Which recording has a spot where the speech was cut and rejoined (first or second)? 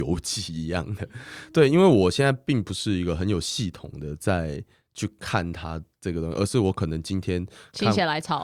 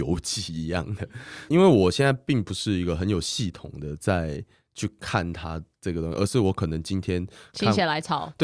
second